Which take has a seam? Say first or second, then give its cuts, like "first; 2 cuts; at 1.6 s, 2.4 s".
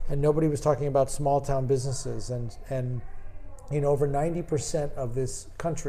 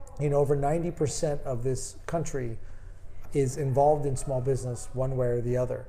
second; 1 cut; at 3.3 s